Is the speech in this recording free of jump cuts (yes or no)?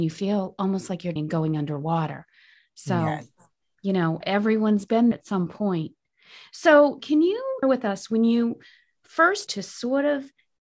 no